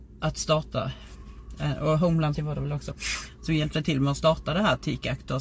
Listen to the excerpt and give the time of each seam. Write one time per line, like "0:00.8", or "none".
0:02.3